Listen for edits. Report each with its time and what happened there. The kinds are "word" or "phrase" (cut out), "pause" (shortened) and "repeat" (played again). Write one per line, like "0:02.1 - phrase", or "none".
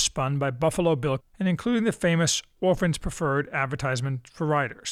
0:01.2 - word